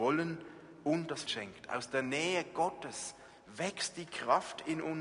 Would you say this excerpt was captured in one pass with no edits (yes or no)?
no